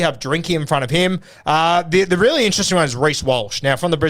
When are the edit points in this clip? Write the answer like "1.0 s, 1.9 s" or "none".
none